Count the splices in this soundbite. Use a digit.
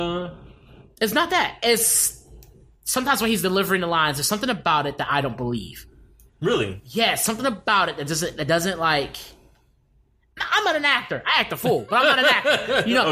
0